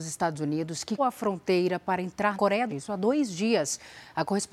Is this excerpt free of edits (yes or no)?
no